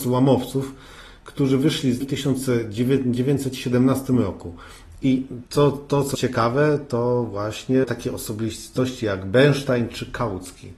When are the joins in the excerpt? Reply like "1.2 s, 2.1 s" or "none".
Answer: 2.0 s, 5.5 s, 6.1 s, 7.8 s